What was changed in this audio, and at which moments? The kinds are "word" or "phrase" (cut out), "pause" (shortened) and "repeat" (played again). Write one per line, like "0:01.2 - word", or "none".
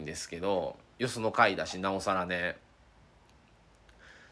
none